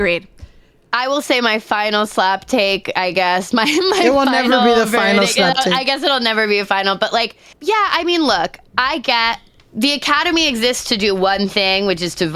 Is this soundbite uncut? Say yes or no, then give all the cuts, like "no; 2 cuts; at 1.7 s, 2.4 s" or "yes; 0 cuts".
no; 1 cut; at 7.5 s